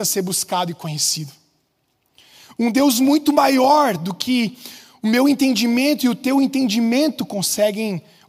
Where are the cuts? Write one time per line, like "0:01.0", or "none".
none